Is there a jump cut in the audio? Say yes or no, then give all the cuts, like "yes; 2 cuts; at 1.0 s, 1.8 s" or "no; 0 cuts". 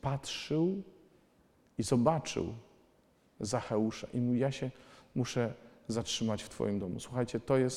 no; 0 cuts